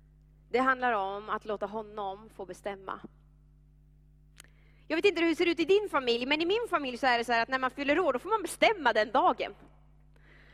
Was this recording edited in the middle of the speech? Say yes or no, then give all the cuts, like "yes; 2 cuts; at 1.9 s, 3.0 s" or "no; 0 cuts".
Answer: no; 0 cuts